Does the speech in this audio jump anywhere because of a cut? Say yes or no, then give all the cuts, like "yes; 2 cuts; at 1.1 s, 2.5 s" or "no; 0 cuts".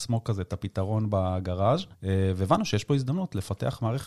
yes; 1 cut; at 1.9 s